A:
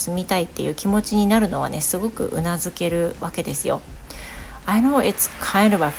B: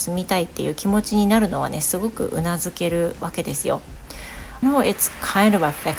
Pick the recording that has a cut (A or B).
B